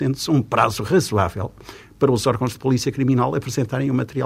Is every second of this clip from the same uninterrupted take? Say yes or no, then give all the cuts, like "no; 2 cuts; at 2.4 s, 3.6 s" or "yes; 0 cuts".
yes; 0 cuts